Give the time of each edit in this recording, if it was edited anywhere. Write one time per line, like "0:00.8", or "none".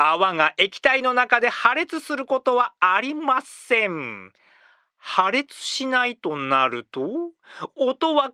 none